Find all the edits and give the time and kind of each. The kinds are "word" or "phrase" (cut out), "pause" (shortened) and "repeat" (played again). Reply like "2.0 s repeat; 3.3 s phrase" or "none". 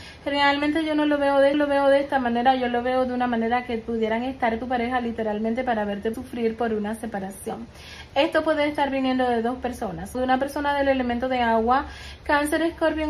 1.5 s repeat; 4.6 s phrase; 6.1 s word; 10.1 s word